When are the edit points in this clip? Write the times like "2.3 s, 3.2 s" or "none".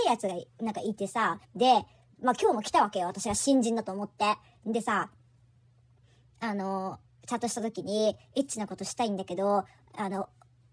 1.4 s